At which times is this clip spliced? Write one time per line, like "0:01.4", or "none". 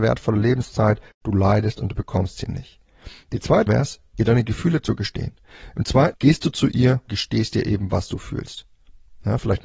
0:03.7
0:06.1
0:07.1

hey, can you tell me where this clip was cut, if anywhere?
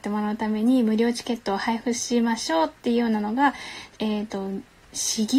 0:03.9

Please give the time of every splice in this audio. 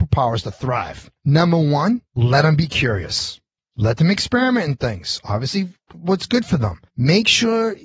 0:01.2
0:02.1
0:03.6
0:06.9

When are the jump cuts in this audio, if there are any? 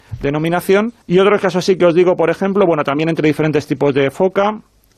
0:01.0

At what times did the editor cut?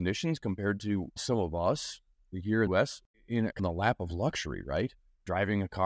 0:01.2
0:02.3
0:02.7
0:03.1
0:03.6

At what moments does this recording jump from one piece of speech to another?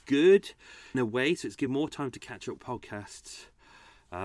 0:00.9
0:01.7
0:02.6

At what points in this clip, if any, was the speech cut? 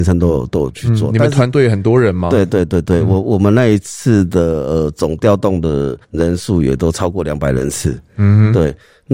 0:06.0

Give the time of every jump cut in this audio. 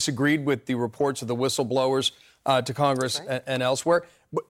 none

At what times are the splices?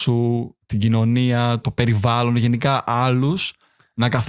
0:01.6

